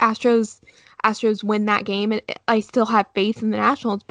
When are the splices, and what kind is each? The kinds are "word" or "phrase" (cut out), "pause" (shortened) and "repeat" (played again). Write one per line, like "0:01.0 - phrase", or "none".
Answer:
none